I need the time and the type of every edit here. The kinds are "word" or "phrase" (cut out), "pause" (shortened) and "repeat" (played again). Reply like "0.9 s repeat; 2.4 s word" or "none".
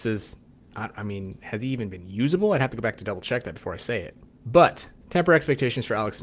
4.3 s pause